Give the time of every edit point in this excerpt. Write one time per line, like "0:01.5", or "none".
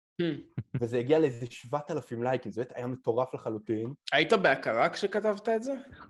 0:04.0